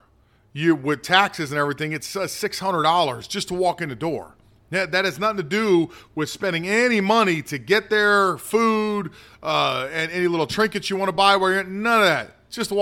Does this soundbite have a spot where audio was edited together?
no; 0 cuts

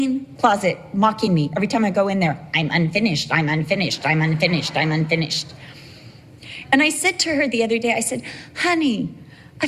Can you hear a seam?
no; 0 cuts

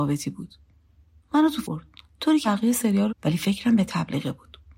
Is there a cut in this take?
yes; 4 cuts; at 1.6 s, 2.1 s, 2.4 s, 3.1 s

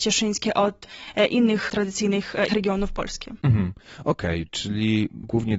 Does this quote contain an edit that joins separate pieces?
yes; 2 cuts; at 1.7 s, 2.5 s

